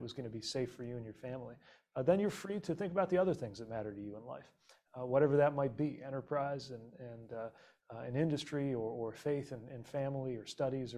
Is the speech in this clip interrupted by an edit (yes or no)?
no